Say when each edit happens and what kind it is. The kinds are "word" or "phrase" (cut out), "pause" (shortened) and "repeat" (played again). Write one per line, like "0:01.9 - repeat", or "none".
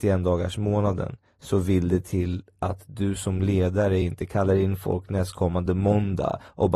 none

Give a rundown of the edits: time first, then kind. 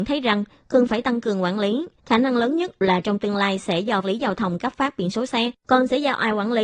0:02.0 - pause
0:04.0 - phrase
0:05.6 - pause

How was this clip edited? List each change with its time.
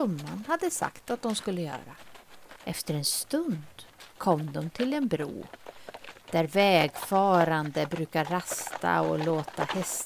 0:02.6 - pause

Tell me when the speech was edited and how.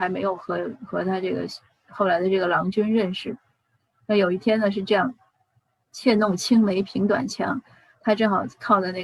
0:01.8 - word

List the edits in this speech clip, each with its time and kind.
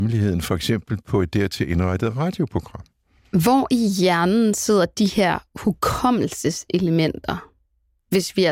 none

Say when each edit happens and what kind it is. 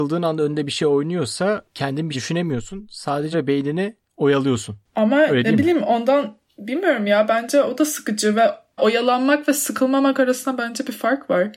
0:02.1 - word
0:03.3 - word
0:04.0 - pause
0:08.8 - phrase

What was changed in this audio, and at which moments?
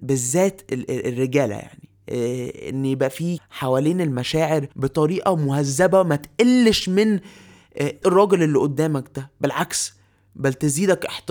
0:03.4 - word
0:04.7 - pause
0:08.0 - word

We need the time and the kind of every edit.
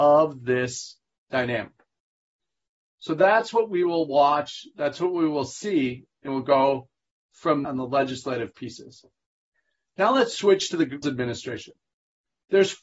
0:06.3 - word
0:07.6 - word
0:11.0 - word

